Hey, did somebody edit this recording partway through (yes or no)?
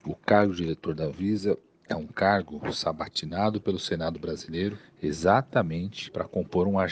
no